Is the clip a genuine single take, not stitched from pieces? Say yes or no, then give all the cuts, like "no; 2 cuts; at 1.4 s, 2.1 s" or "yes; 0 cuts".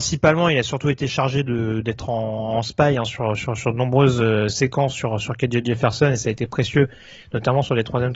yes; 0 cuts